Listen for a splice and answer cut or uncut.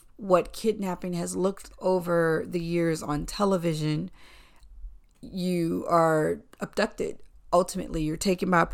cut